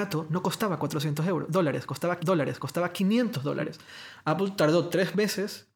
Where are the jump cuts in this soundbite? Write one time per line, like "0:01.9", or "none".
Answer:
0:02.2